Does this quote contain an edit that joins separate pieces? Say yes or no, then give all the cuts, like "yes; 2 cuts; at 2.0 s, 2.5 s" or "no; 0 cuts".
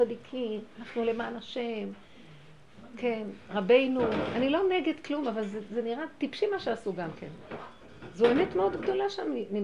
no; 0 cuts